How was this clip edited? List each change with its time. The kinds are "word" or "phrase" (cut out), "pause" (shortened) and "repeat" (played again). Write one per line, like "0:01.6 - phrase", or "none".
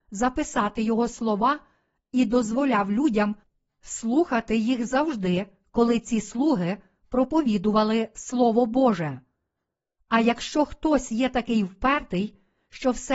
none